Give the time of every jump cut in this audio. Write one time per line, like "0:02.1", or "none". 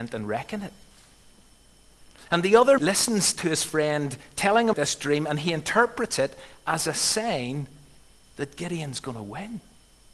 0:02.8
0:04.7